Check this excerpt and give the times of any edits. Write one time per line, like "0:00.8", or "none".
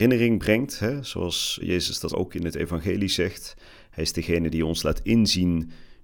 0:01.6
0:02.1